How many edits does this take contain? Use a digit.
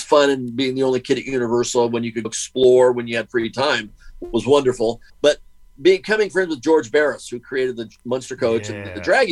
2